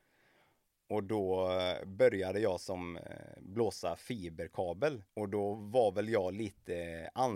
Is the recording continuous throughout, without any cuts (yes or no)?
no